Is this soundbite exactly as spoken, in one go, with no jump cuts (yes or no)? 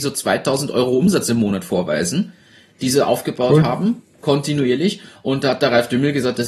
yes